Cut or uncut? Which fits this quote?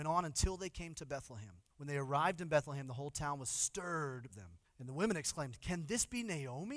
cut